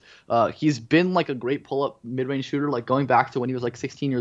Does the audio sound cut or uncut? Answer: uncut